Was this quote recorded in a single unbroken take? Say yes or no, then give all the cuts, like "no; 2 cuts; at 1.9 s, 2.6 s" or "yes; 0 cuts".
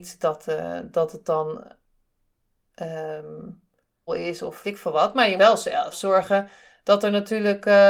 no; 4 cuts; at 4.1 s, 4.6 s, 5.4 s, 5.9 s